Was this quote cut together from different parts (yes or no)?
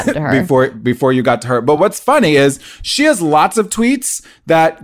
no